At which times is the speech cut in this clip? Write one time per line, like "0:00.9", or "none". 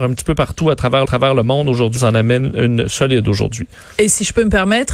0:01.1
0:02.0